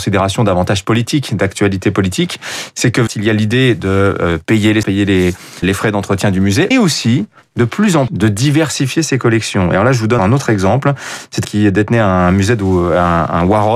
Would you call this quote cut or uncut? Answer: cut